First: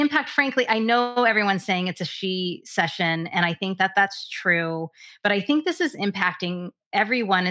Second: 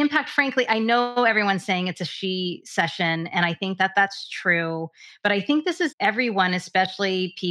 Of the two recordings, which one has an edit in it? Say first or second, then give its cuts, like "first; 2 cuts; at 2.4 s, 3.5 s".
second; 1 cut; at 5.9 s